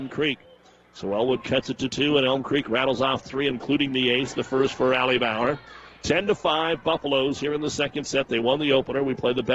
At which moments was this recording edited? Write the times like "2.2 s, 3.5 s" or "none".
3.5 s